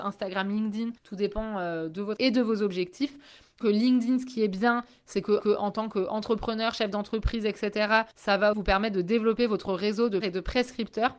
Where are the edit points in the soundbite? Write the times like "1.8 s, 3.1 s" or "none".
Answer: 1.0 s, 2.2 s, 3.6 s, 5.4 s, 8.1 s, 8.5 s, 10.2 s